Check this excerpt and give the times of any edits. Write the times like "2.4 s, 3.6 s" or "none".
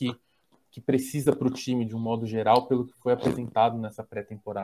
none